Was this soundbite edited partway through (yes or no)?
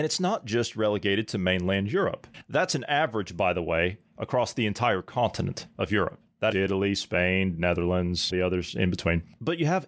yes